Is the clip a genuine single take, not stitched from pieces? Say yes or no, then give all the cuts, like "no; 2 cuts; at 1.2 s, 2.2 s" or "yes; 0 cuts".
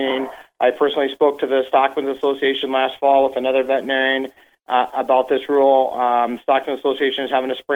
yes; 0 cuts